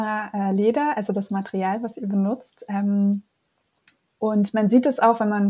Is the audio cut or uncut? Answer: uncut